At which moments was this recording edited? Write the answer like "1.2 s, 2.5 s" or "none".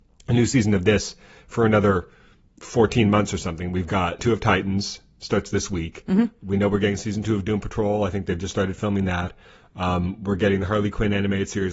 4.2 s